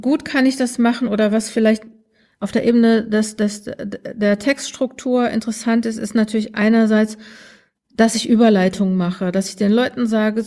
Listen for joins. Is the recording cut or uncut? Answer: uncut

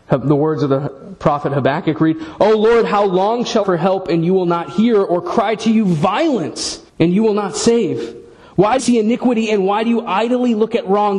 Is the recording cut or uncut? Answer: cut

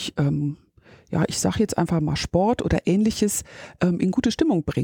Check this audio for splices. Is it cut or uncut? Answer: uncut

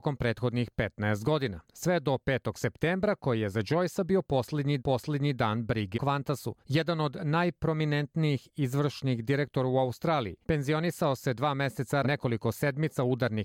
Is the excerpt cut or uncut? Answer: cut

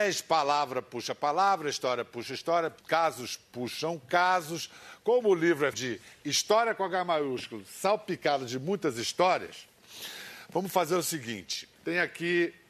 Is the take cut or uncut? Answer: cut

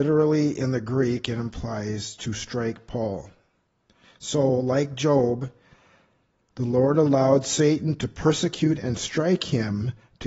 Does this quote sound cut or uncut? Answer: uncut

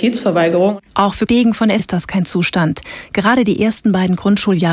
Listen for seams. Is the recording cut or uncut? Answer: cut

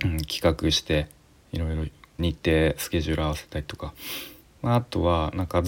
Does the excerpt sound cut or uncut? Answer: cut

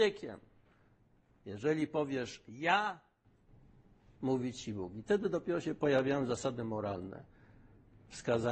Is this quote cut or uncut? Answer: uncut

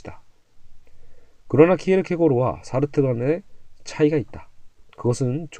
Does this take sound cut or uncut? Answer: uncut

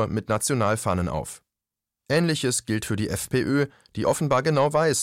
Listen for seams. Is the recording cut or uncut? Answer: uncut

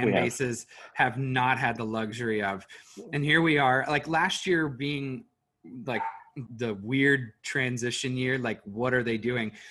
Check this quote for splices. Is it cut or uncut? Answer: cut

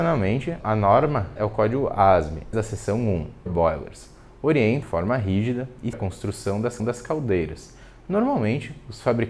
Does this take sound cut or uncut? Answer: cut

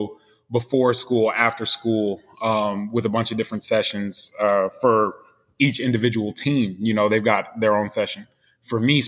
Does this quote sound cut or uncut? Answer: uncut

